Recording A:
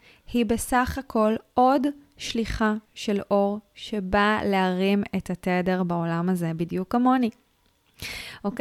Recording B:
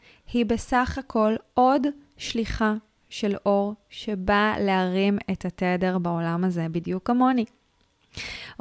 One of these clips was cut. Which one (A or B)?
A